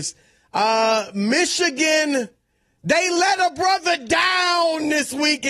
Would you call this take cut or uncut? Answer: uncut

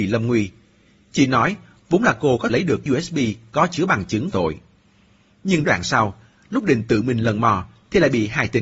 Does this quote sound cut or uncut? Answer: cut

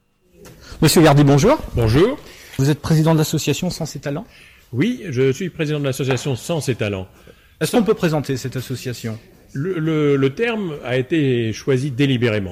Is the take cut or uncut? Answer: uncut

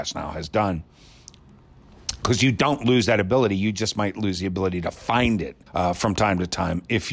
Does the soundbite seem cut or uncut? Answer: cut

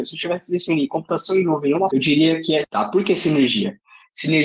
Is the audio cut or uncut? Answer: cut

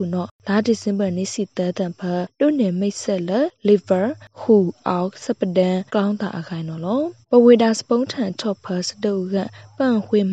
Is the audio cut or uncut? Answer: cut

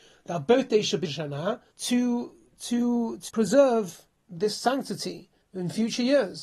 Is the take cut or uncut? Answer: cut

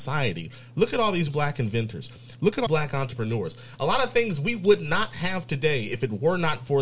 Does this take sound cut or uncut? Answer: cut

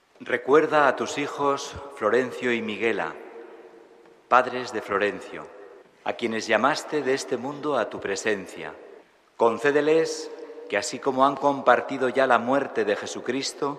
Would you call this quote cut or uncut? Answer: cut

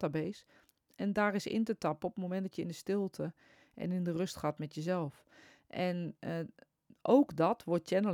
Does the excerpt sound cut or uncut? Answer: uncut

